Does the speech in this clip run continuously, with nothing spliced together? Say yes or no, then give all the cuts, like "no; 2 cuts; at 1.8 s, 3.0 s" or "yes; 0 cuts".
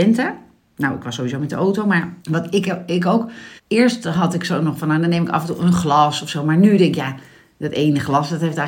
no; 2 cuts; at 2.2 s, 3.6 s